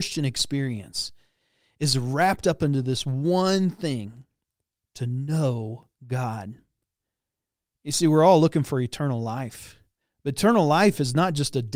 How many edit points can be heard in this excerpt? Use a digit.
2